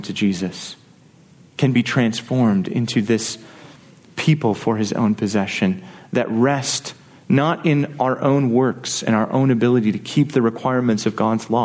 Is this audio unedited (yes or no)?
yes